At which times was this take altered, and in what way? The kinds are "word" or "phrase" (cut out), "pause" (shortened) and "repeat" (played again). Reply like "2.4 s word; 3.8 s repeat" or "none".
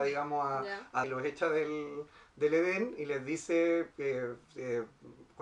1.0 s word; 4.4 s pause